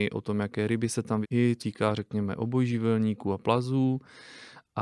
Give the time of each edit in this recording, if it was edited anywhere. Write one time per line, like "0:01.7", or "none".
0:01.2
0:01.6